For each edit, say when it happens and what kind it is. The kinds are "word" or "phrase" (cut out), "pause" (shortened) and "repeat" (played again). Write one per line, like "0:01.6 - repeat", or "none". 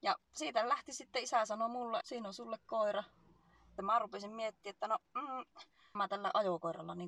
0:02.0 - word
0:03.8 - word
0:06.0 - word